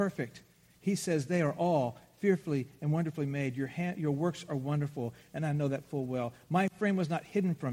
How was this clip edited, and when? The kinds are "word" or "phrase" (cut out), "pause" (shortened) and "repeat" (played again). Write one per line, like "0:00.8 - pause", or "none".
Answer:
none